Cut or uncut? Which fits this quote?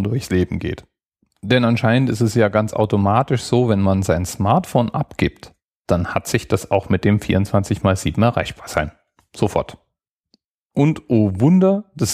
uncut